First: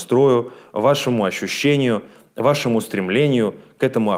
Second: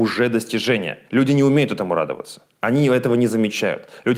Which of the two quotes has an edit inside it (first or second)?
second